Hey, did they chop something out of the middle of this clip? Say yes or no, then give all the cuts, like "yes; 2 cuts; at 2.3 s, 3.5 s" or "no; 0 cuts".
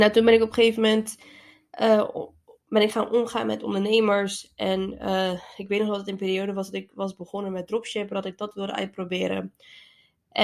no; 0 cuts